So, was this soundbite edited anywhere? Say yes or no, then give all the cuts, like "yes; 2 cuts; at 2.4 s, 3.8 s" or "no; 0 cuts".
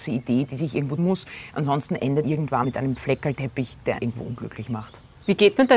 yes; 4 cuts; at 1.0 s, 2.2 s, 2.6 s, 4.0 s